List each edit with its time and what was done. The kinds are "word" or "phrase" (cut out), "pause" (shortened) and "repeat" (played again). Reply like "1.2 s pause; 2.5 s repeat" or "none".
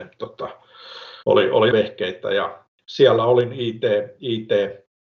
1.2 s pause; 1.7 s phrase